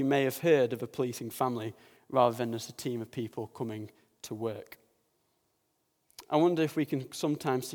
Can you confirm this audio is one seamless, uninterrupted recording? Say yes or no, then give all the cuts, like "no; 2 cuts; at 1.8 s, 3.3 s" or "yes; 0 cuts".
yes; 0 cuts